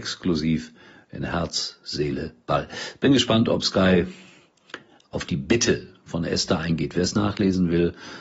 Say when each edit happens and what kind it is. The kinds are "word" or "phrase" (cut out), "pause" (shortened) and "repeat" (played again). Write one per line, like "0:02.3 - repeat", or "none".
none

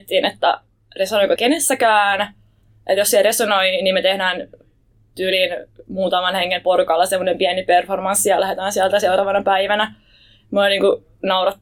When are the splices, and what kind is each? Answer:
0:01.4 - word

